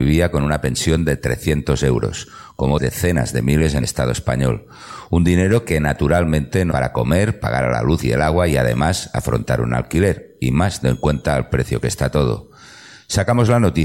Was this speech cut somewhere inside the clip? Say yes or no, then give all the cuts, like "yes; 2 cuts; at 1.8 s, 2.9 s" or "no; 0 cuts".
yes; 4 cuts; at 2.8 s, 3.8 s, 6.7 s, 10.8 s